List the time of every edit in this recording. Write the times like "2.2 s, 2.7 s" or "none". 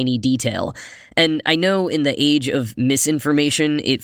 none